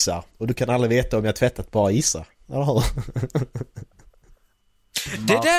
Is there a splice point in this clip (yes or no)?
no